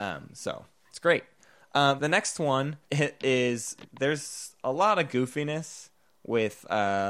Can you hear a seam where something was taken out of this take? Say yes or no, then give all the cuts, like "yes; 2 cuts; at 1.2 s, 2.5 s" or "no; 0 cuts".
yes; 2 cuts; at 2.0 s, 2.8 s